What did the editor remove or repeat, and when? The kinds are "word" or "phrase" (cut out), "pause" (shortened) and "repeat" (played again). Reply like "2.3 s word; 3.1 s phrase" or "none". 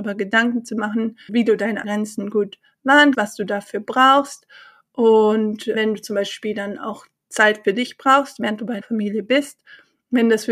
1.3 s word; 1.8 s word; 3.1 s word; 5.7 s word; 8.8 s word